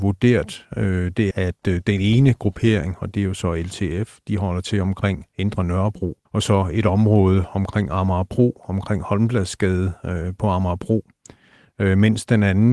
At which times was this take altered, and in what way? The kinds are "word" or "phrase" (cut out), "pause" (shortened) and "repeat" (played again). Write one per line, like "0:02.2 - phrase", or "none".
0:01.3 - word
0:06.3 - pause